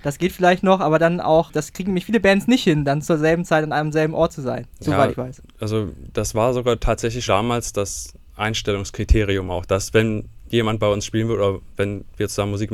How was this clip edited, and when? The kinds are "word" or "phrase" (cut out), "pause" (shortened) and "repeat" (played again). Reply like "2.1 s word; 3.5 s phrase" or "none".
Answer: 7.3 s word

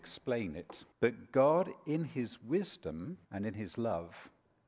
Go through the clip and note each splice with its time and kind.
0.9 s pause; 3.2 s pause

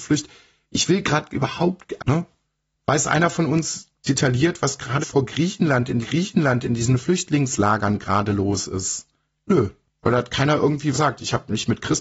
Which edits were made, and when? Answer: 2.0 s word; 5.0 s phrase; 6.0 s repeat; 10.9 s phrase

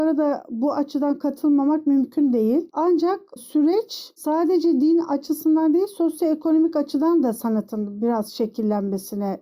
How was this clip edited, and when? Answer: none

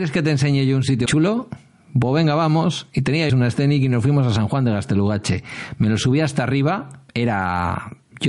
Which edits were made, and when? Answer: 1.1 s word; 3.3 s word; 7.1 s pause

